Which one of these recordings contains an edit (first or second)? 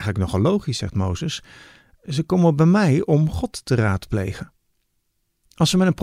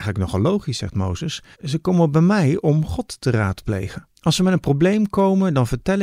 second